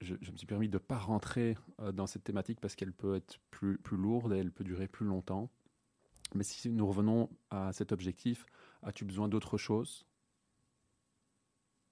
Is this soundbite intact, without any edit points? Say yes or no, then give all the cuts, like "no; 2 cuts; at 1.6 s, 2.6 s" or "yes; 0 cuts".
yes; 0 cuts